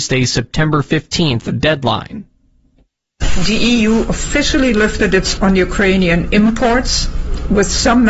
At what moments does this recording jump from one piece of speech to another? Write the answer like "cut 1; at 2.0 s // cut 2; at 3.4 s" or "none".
cut 1; at 5.4 s